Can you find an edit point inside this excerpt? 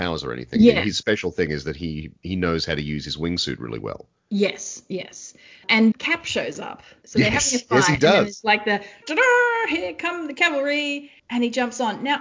yes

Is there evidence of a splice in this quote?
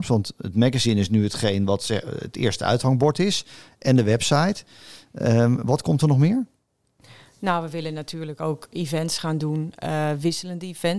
no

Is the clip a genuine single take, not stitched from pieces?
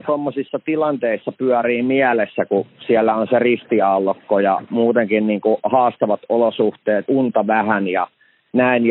no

